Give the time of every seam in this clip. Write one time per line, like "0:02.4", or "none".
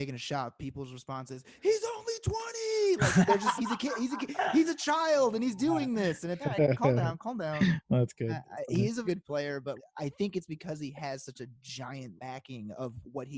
0:03.3
0:03.6
0:06.4
0:09.0
0:09.8
0:12.2